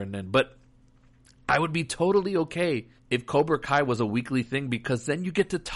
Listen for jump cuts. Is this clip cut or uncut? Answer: cut